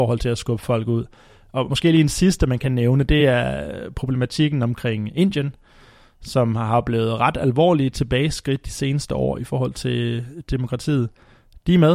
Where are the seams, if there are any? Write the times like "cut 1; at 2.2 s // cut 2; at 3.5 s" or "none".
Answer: none